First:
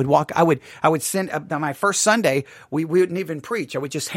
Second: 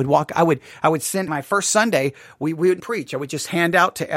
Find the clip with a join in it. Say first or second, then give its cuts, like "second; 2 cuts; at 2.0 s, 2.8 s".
second; 2 cuts; at 1.3 s, 2.8 s